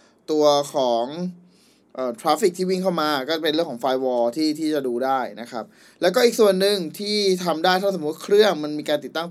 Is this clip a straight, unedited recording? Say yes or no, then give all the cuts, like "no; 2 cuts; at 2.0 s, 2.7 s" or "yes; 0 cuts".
yes; 0 cuts